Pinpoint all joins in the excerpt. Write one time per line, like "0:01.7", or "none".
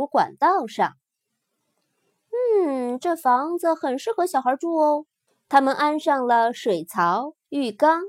0:05.3